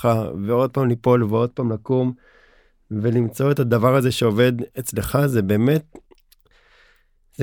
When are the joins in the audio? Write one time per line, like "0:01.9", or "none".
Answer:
none